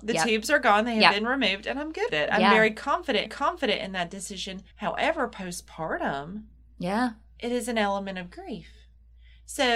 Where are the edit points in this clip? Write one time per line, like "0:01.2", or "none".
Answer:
0:02.1
0:03.3
0:04.7